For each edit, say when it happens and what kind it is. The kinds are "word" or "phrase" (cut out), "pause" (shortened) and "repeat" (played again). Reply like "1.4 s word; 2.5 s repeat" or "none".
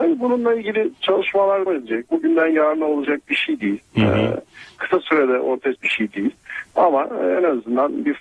1.7 s word; 5.7 s word